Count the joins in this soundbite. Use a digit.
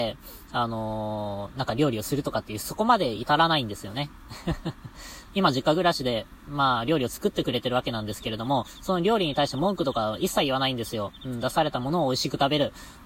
1